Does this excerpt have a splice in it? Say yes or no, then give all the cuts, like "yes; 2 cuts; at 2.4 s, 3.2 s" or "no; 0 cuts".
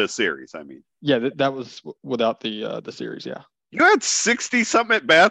no; 0 cuts